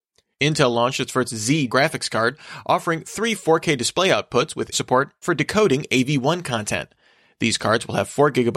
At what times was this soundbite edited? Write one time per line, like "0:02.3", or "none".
0:01.7
0:04.7
0:05.2